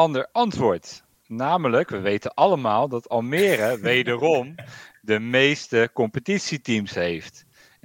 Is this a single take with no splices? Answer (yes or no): yes